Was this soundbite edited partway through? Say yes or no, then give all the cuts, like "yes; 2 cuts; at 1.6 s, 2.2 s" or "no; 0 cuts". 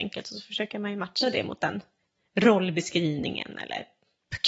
no; 0 cuts